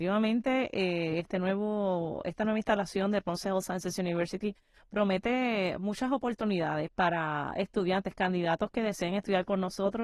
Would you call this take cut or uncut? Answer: uncut